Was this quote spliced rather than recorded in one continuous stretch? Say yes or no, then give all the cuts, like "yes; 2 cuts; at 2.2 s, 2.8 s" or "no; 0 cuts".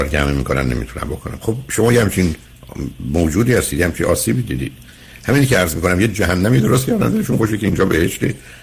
no; 0 cuts